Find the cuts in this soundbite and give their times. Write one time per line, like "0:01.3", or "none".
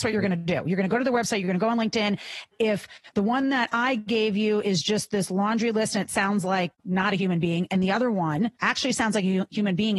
0:08.6